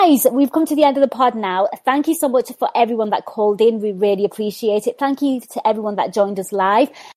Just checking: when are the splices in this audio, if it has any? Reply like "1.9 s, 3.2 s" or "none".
none

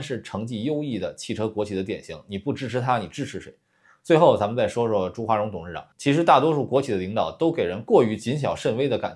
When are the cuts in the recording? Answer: 5.9 s

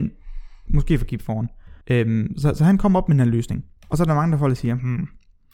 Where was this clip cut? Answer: 1.8 s, 3.8 s

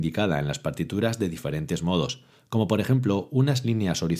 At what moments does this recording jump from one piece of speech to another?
none

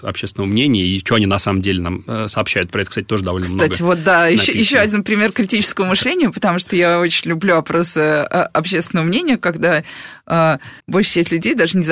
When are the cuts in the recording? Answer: 10.8 s

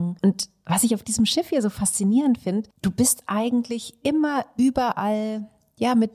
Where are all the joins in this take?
none

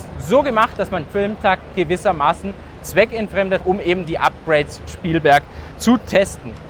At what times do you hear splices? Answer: 1.1 s, 3.6 s, 4.9 s

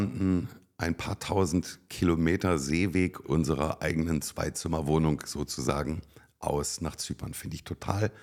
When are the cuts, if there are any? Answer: 3.2 s

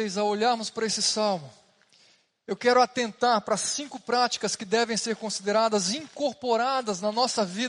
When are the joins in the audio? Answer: none

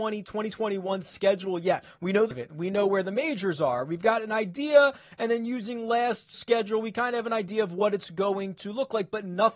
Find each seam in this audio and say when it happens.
2.3 s, 6.3 s

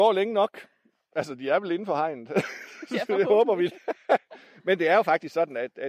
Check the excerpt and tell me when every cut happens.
none

